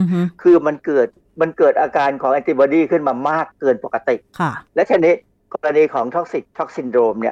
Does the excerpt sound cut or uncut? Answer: cut